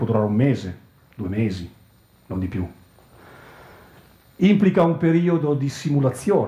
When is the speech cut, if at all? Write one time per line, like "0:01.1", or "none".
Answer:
none